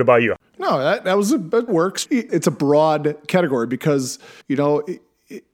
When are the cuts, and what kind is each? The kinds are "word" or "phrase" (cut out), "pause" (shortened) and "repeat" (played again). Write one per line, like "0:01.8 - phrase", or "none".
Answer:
0:01.7 - word
0:02.3 - word
0:04.4 - pause